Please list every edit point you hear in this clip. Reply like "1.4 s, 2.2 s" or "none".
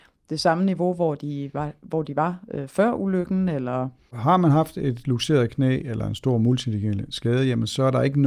none